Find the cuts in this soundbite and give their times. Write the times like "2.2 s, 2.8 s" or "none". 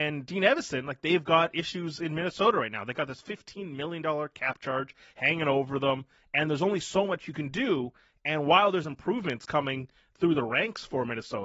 none